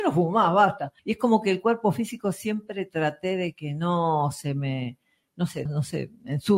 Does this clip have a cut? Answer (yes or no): yes